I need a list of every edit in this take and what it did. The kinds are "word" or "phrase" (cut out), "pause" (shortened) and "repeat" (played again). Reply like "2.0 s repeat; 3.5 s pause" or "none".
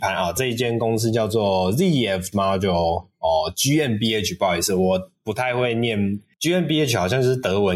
2.3 s word